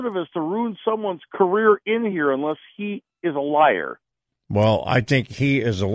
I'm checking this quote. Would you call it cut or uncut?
uncut